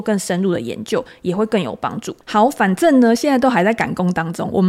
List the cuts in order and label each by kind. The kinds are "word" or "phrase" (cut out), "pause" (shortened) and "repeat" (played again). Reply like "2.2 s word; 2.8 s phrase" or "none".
2.2 s pause